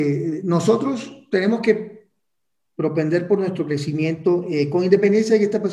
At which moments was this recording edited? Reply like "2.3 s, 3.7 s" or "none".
none